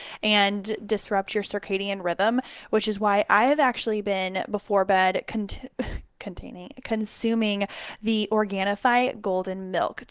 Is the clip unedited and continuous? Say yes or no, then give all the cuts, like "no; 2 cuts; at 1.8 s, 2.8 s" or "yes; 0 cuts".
yes; 0 cuts